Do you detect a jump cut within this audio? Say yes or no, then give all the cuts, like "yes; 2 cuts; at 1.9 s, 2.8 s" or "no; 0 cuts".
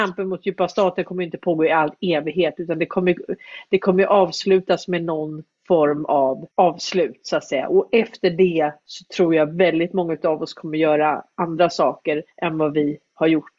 yes; 2 cuts; at 6.5 s, 12.3 s